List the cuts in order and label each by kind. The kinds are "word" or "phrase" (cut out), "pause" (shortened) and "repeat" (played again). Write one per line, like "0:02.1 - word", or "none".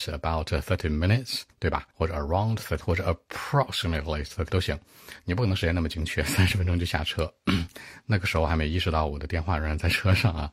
0:01.5 - pause
0:01.9 - pause
0:02.8 - word
0:04.5 - word